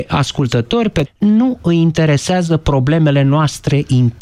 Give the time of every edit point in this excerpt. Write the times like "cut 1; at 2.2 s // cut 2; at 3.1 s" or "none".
cut 1; at 1.1 s